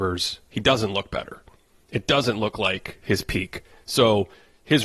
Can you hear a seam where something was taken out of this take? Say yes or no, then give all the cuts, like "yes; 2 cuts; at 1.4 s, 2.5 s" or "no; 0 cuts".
no; 0 cuts